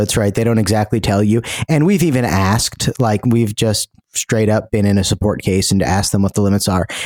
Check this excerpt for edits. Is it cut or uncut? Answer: uncut